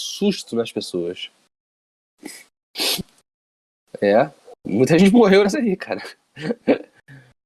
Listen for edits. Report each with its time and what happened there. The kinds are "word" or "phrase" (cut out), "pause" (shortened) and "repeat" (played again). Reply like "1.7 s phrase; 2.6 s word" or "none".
4.6 s pause; 5.5 s word